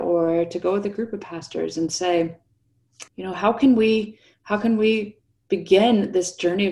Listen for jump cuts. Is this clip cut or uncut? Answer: cut